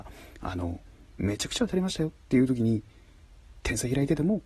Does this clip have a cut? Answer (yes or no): no